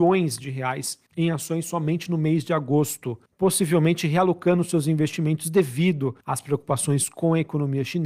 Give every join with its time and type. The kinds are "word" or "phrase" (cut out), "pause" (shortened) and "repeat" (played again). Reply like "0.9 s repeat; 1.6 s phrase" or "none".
1.1 s pause; 3.3 s pause; 6.2 s pause